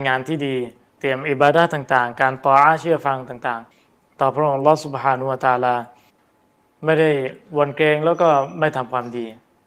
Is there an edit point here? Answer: yes; 2 cuts; at 3.7 s, 6.1 s

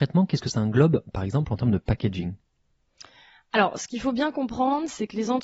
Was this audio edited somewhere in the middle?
no; 0 cuts

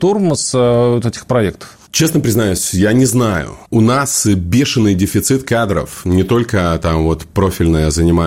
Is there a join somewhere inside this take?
no; 0 cuts

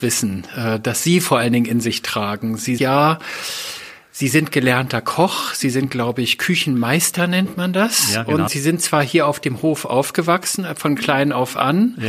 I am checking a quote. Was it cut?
yes; 2 cuts; at 2.8 s, 8.5 s

